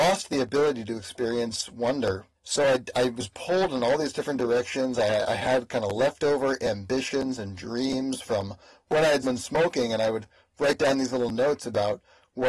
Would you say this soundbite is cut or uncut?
cut